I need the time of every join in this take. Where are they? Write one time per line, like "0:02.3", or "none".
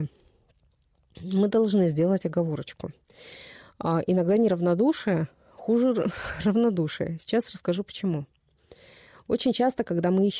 none